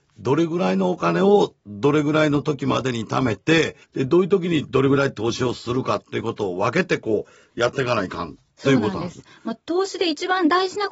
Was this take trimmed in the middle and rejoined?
yes; 1 cut; at 3.8 s

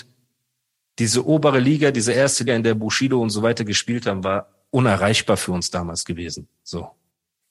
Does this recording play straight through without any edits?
no; 1 cut; at 2.5 s

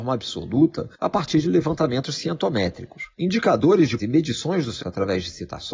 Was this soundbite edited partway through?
yes; 4 cuts; at 0.9 s, 3.1 s, 4.0 s, 4.8 s

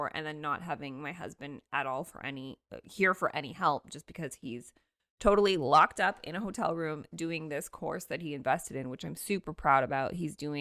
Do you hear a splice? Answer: no; 0 cuts

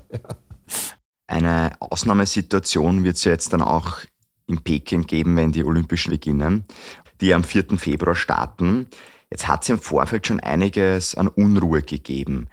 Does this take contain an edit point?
yes; 1 cut; at 6.1 s

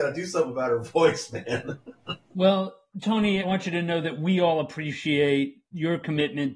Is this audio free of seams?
yes; 0 cuts

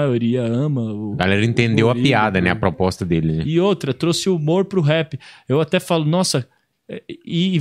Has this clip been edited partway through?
no; 0 cuts

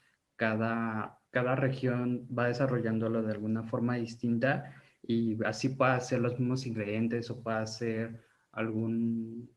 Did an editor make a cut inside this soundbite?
yes; 1 cut; at 1.2 s

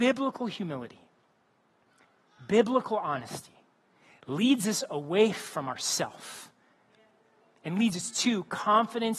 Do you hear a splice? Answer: no; 0 cuts

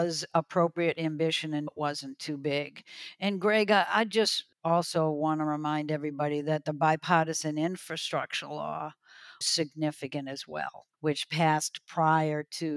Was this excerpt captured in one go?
no; 4 cuts; at 1.7 s, 4.5 s, 9.4 s, 10.9 s

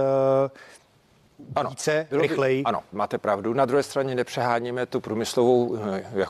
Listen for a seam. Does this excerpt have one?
yes; 1 cut; at 2.9 s

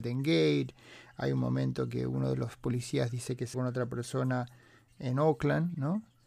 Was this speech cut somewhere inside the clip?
yes; 1 cut; at 3.5 s

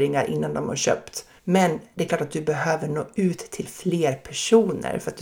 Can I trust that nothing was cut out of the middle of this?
no; 1 cut; at 1.4 s

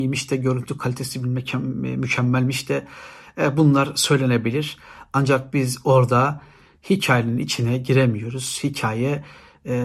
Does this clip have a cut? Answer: no; 0 cuts

